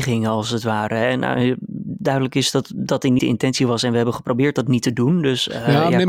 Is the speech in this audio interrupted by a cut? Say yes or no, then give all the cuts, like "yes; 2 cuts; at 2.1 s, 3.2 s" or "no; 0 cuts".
yes; 1 cut; at 3.2 s